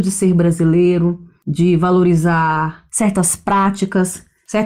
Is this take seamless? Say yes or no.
yes